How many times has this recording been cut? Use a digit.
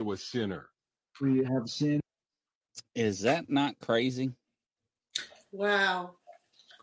0